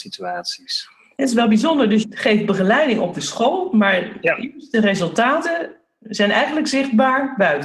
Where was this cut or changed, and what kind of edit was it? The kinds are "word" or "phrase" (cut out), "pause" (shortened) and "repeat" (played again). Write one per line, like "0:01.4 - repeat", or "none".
0:02.0 - phrase